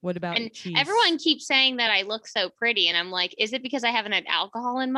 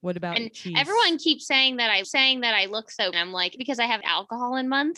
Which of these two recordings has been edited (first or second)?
second